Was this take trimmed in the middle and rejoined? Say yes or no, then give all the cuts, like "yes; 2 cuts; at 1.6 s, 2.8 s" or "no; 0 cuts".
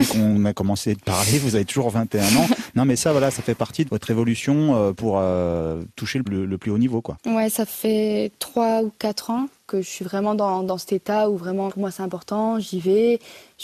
yes; 3 cuts; at 3.9 s, 6.2 s, 11.7 s